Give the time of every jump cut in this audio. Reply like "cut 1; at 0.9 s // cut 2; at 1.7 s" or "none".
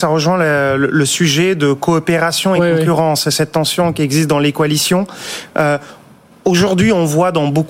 none